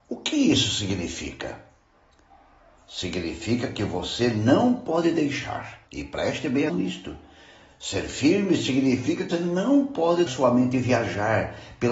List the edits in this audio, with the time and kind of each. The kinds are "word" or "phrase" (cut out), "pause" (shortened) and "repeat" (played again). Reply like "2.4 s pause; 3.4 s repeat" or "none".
5.9 s pause; 6.7 s word; 9.3 s word; 10.3 s word